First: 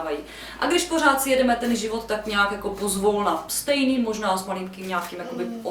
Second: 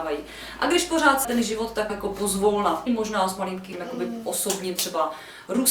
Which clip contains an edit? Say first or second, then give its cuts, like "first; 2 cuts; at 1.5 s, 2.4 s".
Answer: second; 4 cuts; at 1.2 s, 1.9 s, 2.9 s, 3.7 s